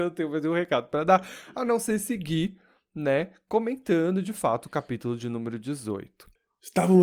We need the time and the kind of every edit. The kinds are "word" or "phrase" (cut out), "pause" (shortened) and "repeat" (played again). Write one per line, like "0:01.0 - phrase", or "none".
none